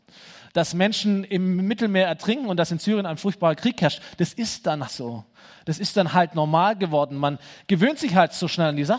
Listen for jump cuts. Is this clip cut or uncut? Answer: cut